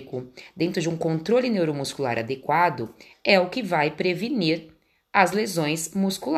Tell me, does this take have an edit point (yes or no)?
no